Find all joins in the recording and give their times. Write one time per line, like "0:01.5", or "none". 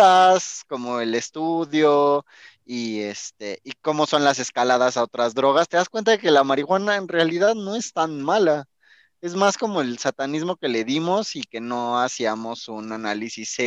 none